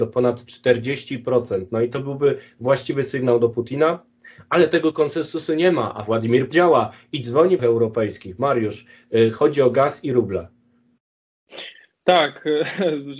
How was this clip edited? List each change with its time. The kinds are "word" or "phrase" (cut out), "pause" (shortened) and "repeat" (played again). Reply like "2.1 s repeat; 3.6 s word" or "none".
6.5 s word; 7.6 s phrase